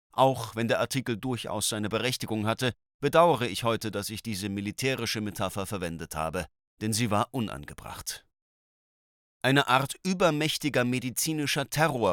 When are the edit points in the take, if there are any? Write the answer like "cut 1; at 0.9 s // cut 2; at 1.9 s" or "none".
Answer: none